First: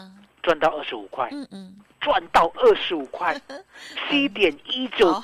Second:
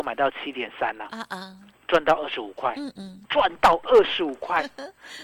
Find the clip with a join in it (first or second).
second